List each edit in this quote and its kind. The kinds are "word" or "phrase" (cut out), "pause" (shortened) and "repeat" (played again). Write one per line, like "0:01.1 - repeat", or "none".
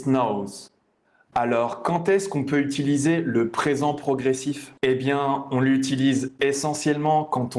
0:04.8 - pause